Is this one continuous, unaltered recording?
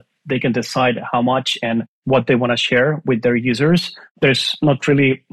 yes; 0 cuts

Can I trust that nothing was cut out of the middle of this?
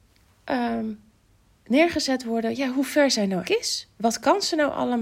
no; 1 cut; at 3.4 s

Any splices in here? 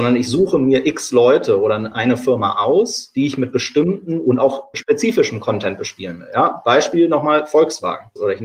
no; 0 cuts

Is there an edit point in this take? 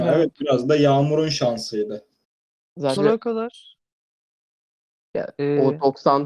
yes; 1 cut; at 3.0 s

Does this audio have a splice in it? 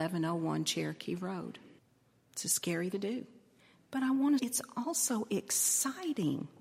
yes; 4 cuts; at 1.8 s, 2.9 s, 3.6 s, 4.4 s

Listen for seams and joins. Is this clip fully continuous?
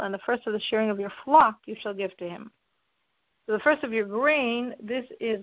yes; 0 cuts

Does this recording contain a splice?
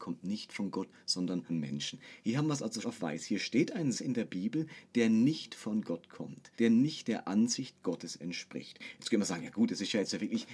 yes; 4 cuts; at 1.5 s, 2.8 s, 3.9 s, 6.5 s

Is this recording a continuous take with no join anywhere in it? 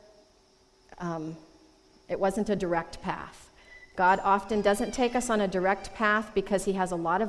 yes; 0 cuts

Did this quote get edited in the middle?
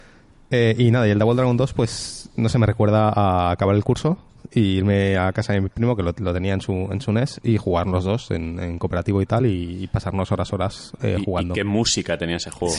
no; 0 cuts

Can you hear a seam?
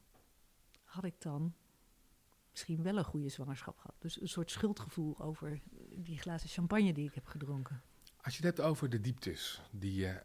no; 0 cuts

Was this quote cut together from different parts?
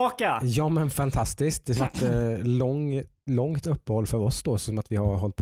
yes; 1 cut; at 1.8 s

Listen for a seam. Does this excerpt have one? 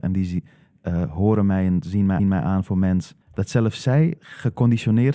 yes; 3 cuts; at 2.2 s, 3.2 s, 4.2 s

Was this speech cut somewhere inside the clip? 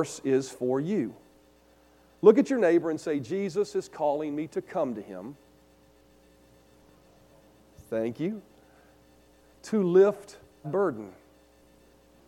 yes; 1 cut; at 10.6 s

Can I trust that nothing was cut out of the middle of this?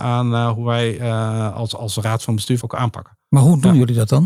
no; 1 cut; at 2.6 s

